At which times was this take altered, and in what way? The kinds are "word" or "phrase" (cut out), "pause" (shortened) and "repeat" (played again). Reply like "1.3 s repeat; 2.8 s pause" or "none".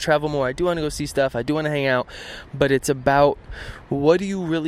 none